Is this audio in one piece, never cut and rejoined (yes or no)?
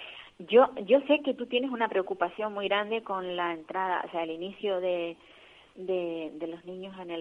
yes